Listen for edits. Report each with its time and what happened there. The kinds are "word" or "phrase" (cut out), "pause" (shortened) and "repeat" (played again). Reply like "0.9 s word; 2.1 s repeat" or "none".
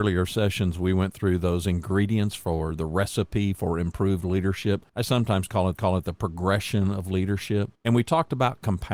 4.9 s pause; 5.8 s repeat; 7.7 s pause

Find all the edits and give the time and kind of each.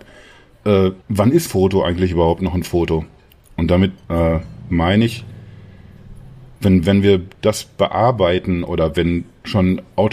1.0 s pause; 1.5 s word; 4.0 s pause

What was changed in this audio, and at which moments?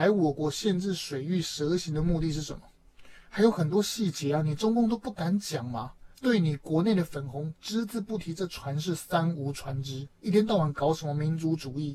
6.1 s pause; 10.1 s pause

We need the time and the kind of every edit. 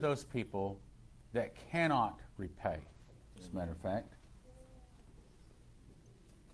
1.2 s pause

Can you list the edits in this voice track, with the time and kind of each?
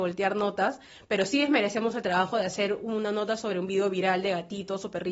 none

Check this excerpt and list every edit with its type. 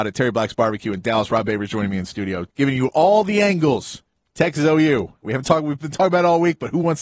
2.5 s pause; 4.1 s pause

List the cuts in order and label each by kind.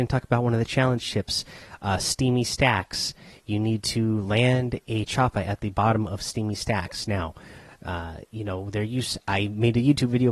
none

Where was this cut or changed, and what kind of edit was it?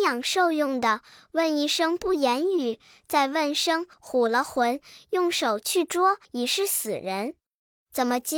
3.9 s pause; 6.2 s pause

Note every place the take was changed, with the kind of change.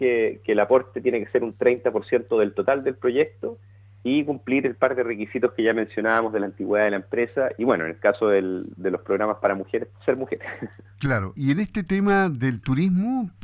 11.4 s word

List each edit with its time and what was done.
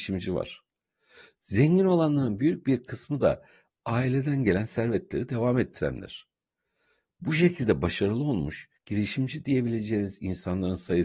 8.8 s pause

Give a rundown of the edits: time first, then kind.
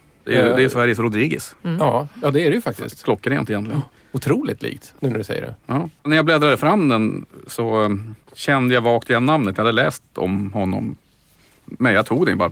6.0 s pause

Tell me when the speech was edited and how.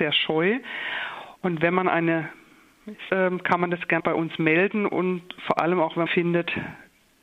3.1 s word; 4.0 s word; 6.1 s phrase

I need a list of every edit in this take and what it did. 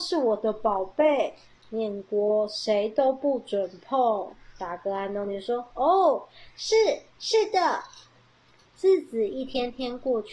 none

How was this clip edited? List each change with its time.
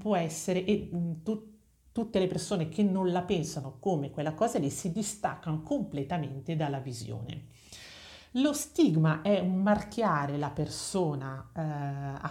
none

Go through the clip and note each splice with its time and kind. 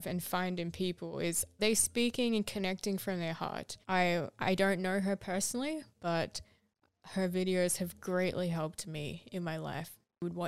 1.6 s word; 3.8 s pause

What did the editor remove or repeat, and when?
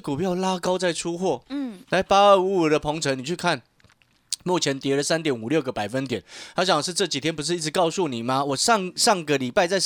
1.8 s pause

